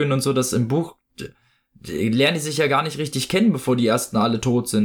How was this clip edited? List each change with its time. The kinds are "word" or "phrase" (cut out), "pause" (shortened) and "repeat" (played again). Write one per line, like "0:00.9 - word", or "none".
none